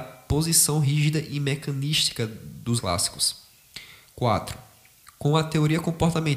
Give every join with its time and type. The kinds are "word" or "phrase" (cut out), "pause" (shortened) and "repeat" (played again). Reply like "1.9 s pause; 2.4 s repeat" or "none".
2.8 s word